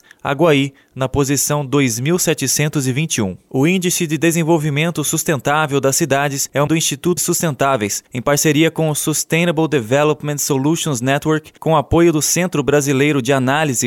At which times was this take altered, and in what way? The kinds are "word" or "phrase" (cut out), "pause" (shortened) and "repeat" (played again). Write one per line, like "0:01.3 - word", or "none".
0:06.7 - word
0:07.2 - word
0:08.1 - pause
0:11.6 - pause